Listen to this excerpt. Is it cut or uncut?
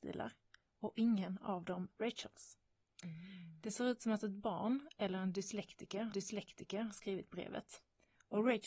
cut